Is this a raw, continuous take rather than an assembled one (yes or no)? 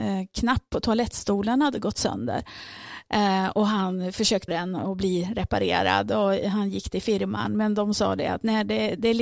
no